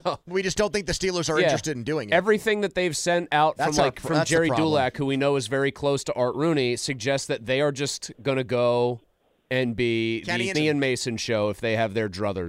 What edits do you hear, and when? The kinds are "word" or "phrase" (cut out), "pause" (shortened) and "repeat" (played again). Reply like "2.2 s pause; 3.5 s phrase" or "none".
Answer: 10.5 s word